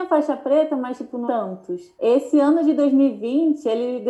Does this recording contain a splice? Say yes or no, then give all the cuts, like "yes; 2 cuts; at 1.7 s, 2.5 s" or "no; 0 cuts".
yes; 2 cuts; at 1.3 s, 1.9 s